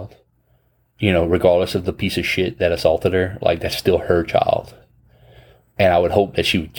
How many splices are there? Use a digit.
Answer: 0